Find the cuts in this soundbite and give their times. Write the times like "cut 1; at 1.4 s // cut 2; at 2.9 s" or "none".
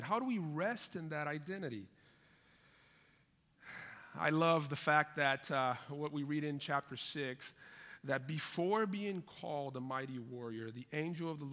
none